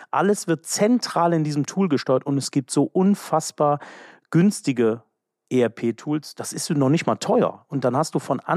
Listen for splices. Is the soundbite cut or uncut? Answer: uncut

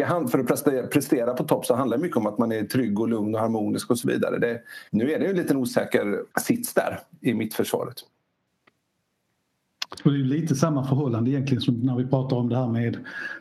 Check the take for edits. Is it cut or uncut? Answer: cut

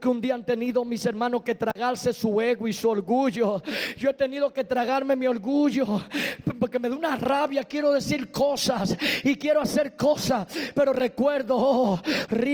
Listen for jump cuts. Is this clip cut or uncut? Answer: uncut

